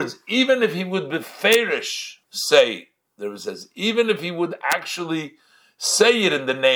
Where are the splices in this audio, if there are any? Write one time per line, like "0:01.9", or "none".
0:02.2